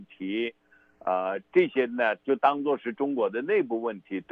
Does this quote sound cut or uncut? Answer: uncut